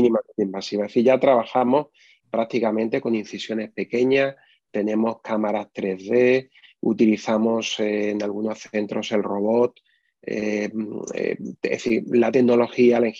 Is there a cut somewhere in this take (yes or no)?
no